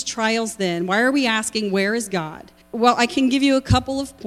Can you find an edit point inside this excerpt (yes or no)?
yes